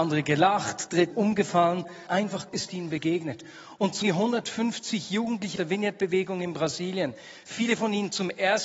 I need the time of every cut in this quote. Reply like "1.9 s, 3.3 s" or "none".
1.1 s, 2.1 s, 2.5 s, 4.0 s, 5.6 s